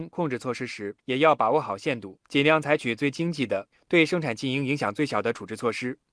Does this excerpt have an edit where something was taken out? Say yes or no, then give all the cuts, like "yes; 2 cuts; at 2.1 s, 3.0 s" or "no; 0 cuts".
yes; 2 cuts; at 1.0 s, 2.2 s